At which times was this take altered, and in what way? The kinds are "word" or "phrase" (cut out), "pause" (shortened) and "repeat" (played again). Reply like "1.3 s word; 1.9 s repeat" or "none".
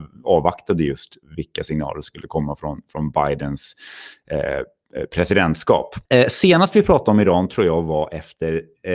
6.1 s pause